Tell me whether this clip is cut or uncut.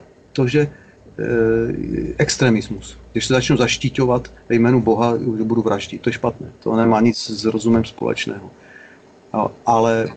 cut